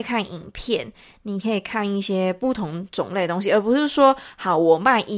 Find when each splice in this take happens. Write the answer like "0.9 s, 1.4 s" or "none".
none